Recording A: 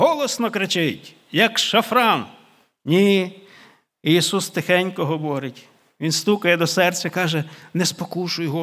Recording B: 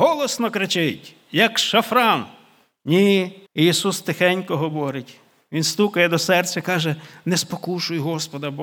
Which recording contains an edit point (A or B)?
B